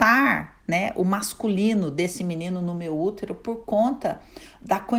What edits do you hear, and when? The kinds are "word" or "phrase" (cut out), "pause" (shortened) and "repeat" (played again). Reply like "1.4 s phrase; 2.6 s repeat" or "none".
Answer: none